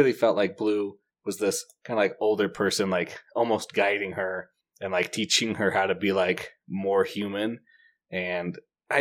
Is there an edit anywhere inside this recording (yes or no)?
no